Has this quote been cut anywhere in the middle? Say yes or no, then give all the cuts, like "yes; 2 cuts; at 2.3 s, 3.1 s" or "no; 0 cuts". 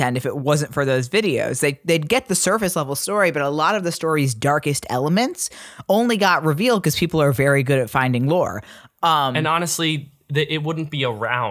no; 0 cuts